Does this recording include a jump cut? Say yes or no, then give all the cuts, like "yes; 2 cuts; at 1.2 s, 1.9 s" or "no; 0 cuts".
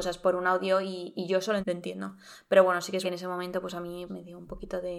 yes; 3 cuts; at 1.6 s, 3.0 s, 4.1 s